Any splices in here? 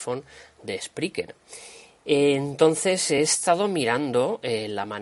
no; 0 cuts

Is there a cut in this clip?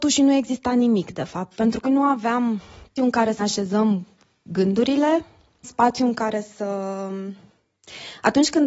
yes; 4 cuts; at 1.8 s, 3.0 s, 3.4 s, 5.6 s

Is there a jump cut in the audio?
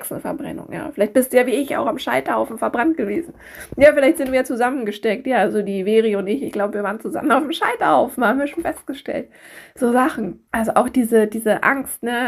yes; 1 cut; at 10.5 s

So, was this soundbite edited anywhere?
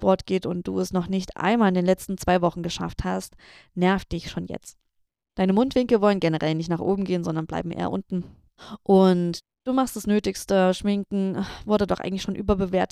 no; 0 cuts

